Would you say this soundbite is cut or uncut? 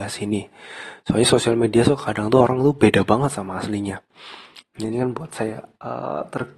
uncut